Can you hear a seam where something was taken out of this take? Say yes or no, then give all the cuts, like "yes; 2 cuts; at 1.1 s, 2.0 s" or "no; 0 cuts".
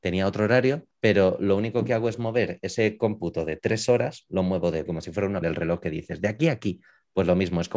yes; 3 cuts; at 0.9 s, 4.9 s, 5.4 s